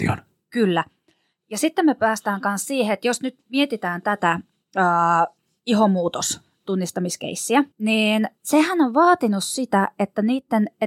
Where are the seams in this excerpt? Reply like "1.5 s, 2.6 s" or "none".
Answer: 7.7 s